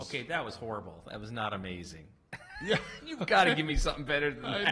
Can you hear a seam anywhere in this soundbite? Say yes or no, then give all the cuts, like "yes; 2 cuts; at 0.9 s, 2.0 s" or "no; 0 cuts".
no; 0 cuts